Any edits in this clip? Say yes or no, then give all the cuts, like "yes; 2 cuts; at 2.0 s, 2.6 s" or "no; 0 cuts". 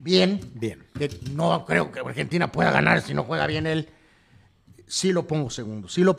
no; 0 cuts